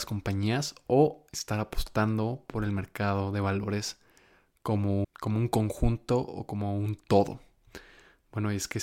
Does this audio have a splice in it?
yes; 1 cut; at 5.0 s

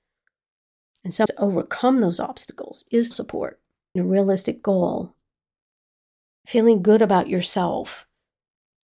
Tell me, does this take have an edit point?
yes; 3 cuts; at 1.3 s, 3.1 s, 4.0 s

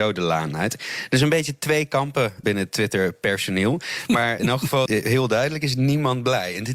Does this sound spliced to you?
yes; 3 cuts; at 2.4 s, 4.4 s, 4.9 s

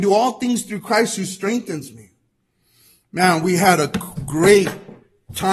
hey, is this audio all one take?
yes; 0 cuts

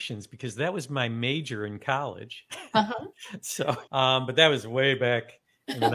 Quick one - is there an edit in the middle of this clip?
yes; 1 cut; at 3.9 s

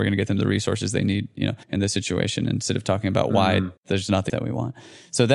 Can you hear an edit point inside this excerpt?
yes; 3 cuts; at 1.6 s, 3.8 s, 4.3 s

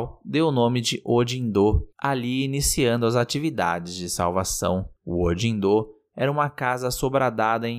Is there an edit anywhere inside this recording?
yes; 2 cuts; at 1.9 s, 5.0 s

